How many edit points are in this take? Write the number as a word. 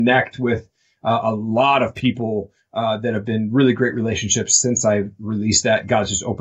zero